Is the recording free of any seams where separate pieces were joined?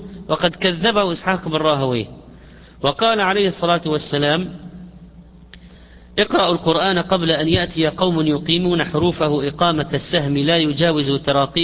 yes; 0 cuts

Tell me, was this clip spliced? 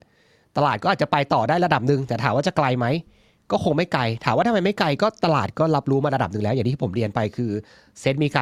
no; 0 cuts

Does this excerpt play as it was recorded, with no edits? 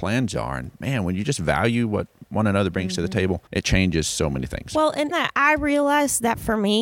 no; 2 cuts; at 3.5 s, 5.1 s

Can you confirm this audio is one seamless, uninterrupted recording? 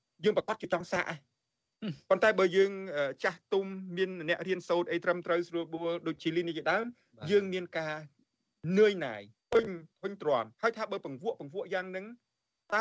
no; 3 cuts; at 9.3 s, 9.9 s, 10.5 s

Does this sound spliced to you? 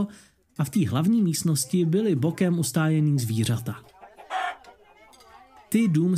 no; 0 cuts

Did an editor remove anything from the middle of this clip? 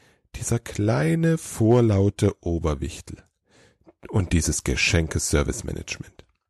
no; 0 cuts

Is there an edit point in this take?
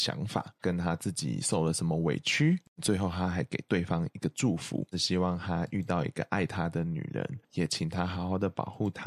yes; 1 cut; at 7.4 s

